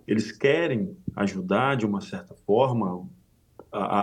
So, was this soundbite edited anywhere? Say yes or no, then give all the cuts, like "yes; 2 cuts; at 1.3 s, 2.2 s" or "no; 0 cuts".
no; 0 cuts